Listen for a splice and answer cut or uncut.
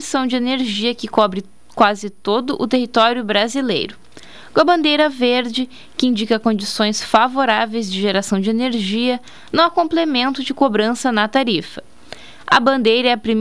uncut